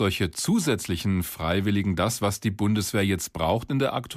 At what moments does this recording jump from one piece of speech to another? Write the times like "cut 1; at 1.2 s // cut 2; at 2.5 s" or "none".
none